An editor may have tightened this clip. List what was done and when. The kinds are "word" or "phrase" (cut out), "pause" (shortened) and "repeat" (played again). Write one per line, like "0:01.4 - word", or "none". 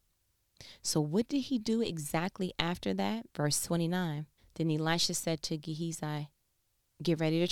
0:03.3 - pause
0:04.4 - pause